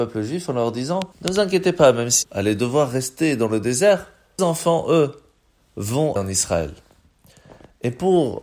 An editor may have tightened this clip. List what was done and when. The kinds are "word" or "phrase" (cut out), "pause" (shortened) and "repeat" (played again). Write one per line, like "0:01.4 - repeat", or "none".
0:01.1 - pause
0:02.2 - word
0:04.4 - word
0:06.2 - word